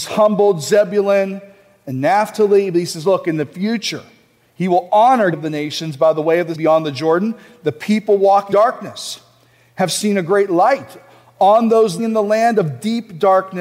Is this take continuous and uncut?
no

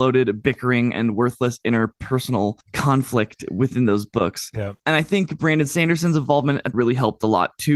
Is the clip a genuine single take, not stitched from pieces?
no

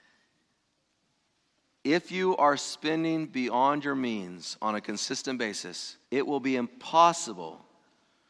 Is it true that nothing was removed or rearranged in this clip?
no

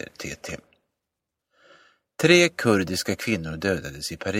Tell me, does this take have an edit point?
no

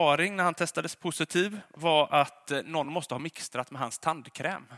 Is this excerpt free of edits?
yes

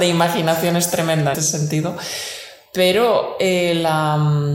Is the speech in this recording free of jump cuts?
no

